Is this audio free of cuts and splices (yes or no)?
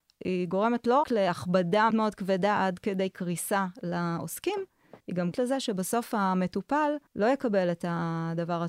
no